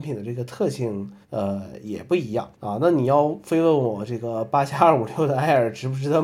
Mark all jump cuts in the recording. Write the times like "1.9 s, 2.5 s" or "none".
1.2 s, 2.5 s